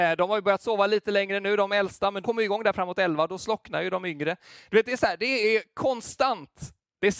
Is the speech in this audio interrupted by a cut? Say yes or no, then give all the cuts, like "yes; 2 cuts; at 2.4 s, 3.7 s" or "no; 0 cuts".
yes; 1 cut; at 2.2 s